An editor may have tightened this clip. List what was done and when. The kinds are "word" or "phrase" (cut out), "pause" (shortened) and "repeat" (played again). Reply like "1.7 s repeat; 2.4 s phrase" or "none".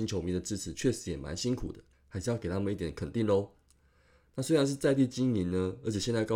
1.9 s pause